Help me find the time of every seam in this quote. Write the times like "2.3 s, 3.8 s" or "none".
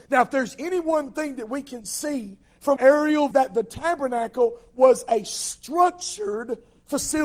2.8 s, 3.3 s